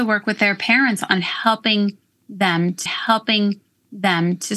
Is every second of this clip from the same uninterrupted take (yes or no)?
no